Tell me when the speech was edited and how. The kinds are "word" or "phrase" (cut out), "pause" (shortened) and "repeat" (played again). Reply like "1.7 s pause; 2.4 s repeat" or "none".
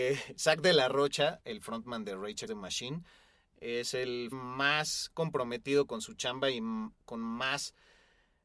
2.5 s word; 4.3 s word